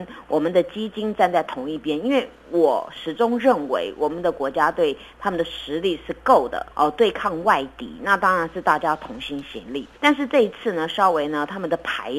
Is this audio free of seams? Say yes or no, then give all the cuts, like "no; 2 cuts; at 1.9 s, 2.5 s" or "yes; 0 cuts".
no; 2 cuts; at 6.7 s, 10.0 s